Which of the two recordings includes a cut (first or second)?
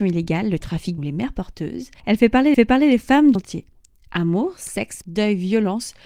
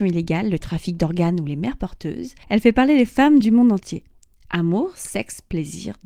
first